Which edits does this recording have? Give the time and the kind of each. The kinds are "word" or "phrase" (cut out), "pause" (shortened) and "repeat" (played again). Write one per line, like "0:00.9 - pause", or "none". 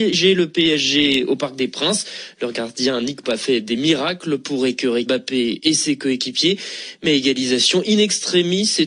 0:03.2 - word
0:05.1 - word